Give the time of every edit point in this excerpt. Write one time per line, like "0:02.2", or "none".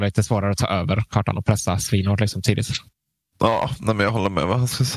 none